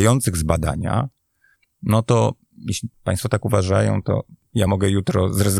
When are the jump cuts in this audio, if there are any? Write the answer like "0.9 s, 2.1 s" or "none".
none